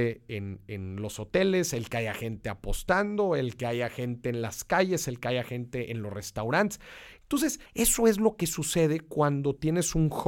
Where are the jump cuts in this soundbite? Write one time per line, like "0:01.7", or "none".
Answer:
0:07.7